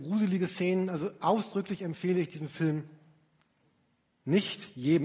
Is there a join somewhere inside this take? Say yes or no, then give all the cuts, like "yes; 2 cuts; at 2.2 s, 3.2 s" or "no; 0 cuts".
no; 0 cuts